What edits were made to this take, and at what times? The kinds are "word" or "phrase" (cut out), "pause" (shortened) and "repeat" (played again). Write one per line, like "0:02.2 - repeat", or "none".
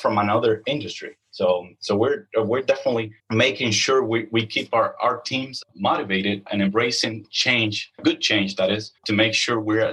0:03.2 - pause
0:09.0 - pause